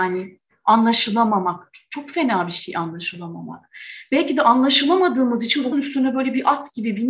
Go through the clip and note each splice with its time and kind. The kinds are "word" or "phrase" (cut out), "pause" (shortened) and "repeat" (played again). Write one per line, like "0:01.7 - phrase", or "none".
0:05.7 - phrase